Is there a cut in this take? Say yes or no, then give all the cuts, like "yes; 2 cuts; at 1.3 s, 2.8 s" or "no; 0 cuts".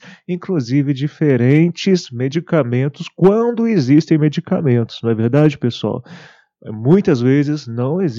no; 0 cuts